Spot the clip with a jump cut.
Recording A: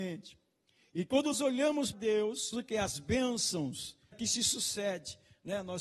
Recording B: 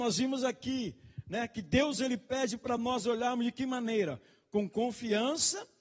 A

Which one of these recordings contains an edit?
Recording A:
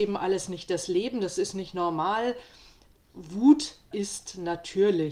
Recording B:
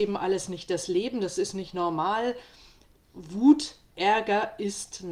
A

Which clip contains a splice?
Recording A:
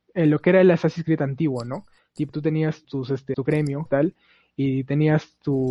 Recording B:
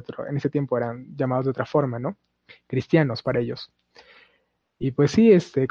A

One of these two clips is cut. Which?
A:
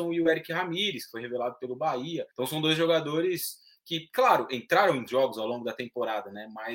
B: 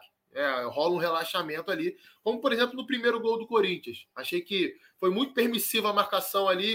A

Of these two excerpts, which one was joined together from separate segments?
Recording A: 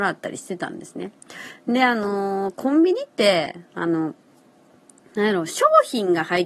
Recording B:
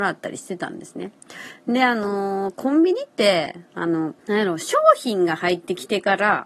B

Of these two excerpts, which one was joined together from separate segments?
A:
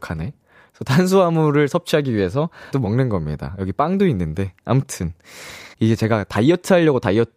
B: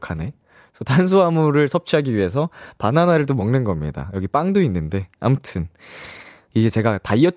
A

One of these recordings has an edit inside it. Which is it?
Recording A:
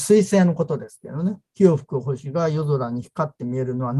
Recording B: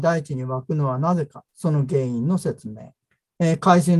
B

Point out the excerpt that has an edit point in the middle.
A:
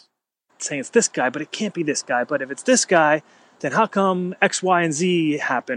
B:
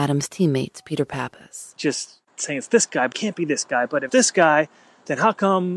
B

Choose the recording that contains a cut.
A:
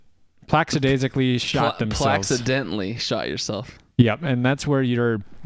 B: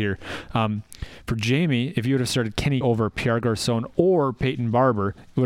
B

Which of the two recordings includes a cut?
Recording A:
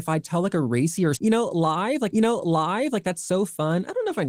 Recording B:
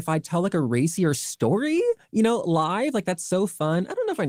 A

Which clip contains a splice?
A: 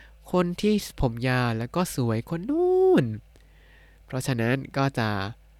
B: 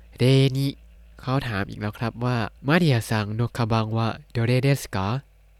B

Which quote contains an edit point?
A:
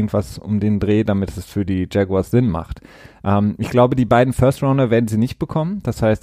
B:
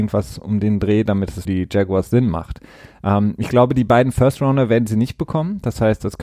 B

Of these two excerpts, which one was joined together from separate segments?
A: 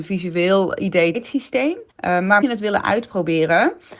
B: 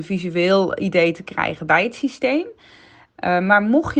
A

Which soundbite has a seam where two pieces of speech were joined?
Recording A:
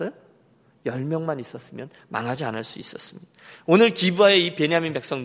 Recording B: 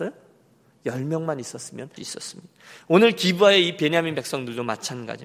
B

